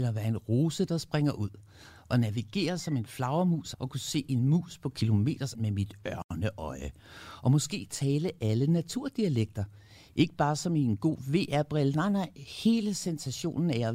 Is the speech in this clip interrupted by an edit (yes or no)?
yes